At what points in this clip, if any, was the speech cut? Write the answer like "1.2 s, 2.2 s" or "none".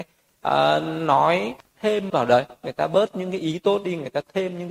2.1 s